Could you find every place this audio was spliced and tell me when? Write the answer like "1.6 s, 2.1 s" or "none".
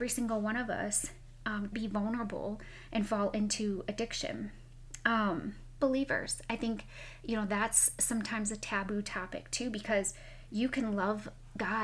1.7 s, 5.8 s